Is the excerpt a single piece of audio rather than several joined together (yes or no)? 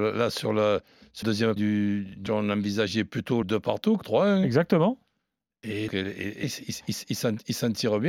no